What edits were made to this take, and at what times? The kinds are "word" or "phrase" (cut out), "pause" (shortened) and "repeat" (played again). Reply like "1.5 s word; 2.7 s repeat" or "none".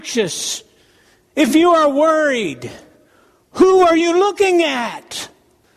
none

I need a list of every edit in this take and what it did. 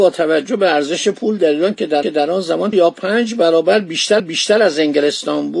2.0 s repeat; 2.7 s word; 4.2 s repeat

